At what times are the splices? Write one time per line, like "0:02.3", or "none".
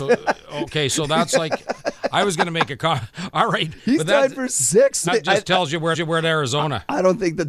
0:05.1
0:05.9